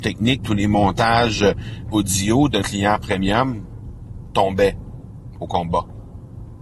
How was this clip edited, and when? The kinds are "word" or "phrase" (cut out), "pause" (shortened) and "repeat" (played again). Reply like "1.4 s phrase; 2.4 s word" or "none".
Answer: 1.9 s word; 2.6 s word